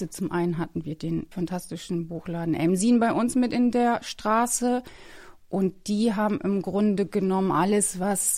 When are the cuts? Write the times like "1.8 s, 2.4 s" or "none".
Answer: 1.3 s